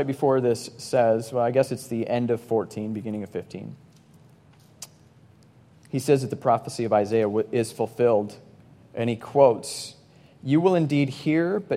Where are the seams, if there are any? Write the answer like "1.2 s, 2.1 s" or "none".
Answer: none